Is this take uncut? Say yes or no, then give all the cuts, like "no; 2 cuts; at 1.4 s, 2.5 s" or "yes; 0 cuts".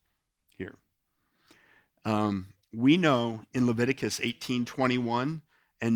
yes; 0 cuts